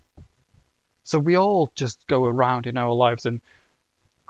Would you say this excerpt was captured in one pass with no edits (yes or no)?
yes